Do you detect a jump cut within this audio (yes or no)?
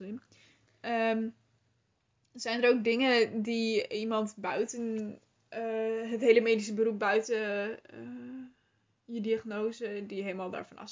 no